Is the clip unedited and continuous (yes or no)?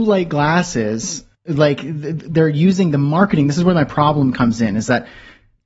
no